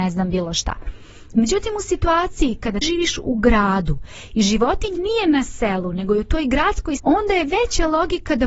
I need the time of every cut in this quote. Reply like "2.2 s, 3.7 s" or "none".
2.8 s, 5.0 s, 7.0 s